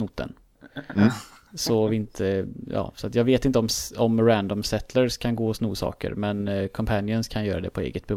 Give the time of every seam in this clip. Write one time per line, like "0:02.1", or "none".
none